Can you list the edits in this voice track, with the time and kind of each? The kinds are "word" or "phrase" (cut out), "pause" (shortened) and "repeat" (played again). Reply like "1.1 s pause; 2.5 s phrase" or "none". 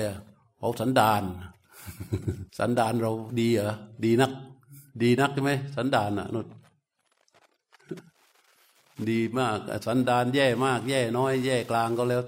2.5 s pause; 4.9 s pause

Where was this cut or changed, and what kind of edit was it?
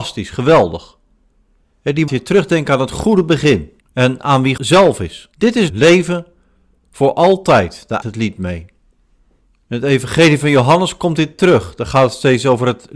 2.1 s phrase; 3.8 s pause; 4.6 s word; 5.3 s pause; 5.7 s word; 8.0 s word; 9.4 s pause

